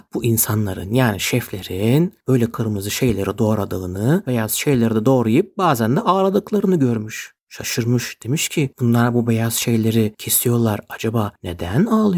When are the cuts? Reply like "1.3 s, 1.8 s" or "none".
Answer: 2.5 s, 4.2 s